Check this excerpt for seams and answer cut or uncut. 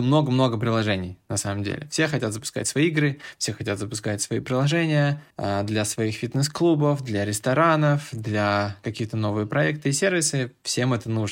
cut